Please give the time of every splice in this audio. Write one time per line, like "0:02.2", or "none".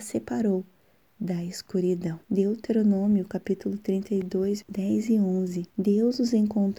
0:02.2
0:04.6
0:05.7